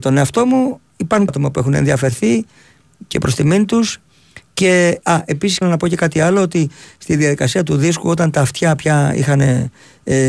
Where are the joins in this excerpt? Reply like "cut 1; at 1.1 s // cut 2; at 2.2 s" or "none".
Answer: cut 1; at 1.3 s // cut 2; at 5.6 s

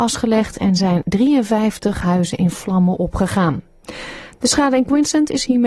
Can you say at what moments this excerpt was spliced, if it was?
none

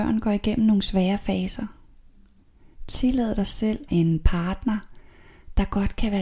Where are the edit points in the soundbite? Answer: cut 1; at 2.4 s // cut 2; at 3.9 s

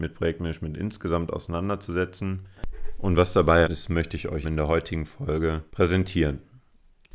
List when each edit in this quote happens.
cut 1; at 3.6 s // cut 2; at 4.4 s // cut 3; at 5.7 s

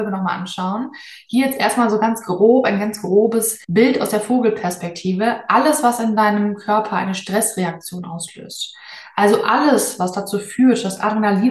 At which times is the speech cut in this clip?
cut 1; at 3.6 s

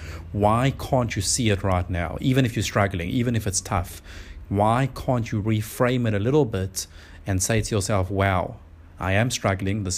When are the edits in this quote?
none

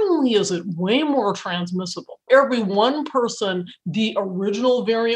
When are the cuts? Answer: cut 1; at 2.3 s

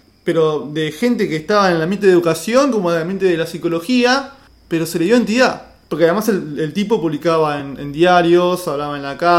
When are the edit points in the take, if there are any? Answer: none

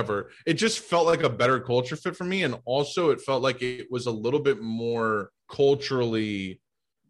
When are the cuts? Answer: cut 1; at 5.4 s

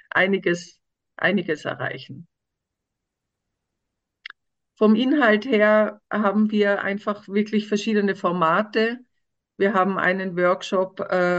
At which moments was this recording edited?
none

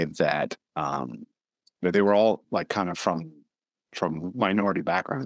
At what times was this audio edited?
none

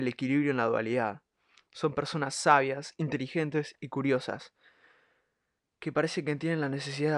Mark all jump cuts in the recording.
none

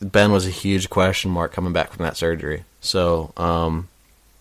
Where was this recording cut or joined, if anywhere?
cut 1; at 2.7 s

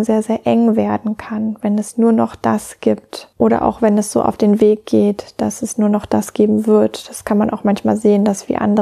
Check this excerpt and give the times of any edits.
cut 1; at 3.3 s

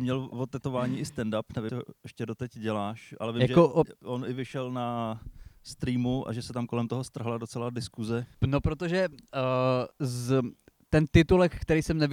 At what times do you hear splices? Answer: cut 1; at 1.7 s // cut 2; at 8.3 s // cut 3; at 9.9 s

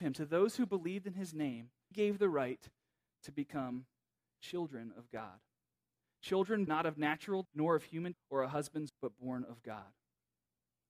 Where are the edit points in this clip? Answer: cut 1; at 1.9 s // cut 2; at 6.7 s // cut 3; at 7.4 s // cut 4; at 8.1 s // cut 5; at 8.9 s

